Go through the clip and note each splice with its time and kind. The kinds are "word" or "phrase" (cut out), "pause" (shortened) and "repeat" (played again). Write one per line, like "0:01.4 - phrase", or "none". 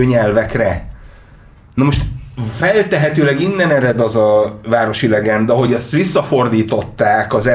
none